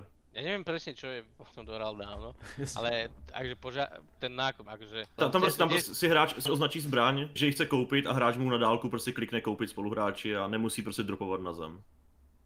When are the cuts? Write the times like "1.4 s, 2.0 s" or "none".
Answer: 1.5 s, 4.2 s, 4.7 s, 5.2 s, 5.8 s, 6.5 s, 7.4 s